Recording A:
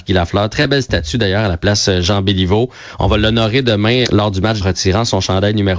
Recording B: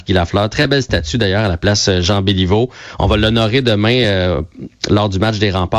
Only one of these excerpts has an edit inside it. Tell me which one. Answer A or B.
A